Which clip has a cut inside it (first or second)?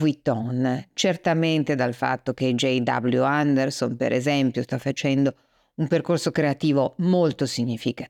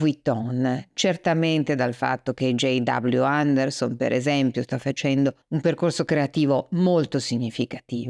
second